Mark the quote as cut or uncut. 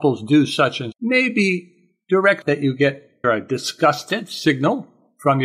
cut